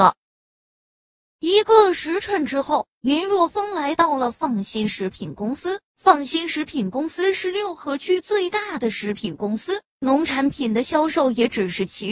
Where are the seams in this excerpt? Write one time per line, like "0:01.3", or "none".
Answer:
0:05.9